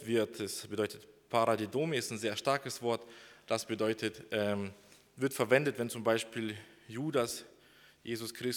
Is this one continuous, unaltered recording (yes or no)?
yes